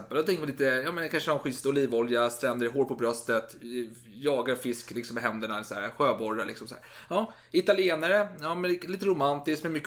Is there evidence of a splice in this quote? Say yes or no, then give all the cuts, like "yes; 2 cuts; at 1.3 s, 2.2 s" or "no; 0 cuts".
no; 0 cuts